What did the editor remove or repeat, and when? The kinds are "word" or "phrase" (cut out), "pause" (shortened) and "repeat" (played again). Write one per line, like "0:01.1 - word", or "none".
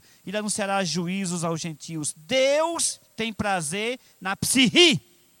0:03.0 - pause